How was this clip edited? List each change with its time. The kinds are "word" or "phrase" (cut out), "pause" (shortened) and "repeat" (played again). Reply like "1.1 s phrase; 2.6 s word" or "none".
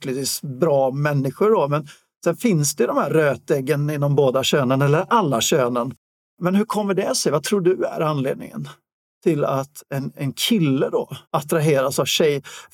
11.2 s pause